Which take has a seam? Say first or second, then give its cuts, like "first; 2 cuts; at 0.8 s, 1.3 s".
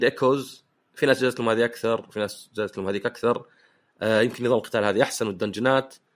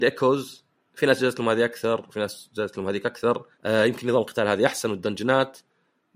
second; 1 cut; at 3.5 s